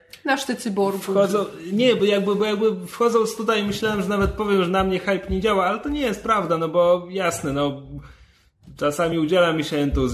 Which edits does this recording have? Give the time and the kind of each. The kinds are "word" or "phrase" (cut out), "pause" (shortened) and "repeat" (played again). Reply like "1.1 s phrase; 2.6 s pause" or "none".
none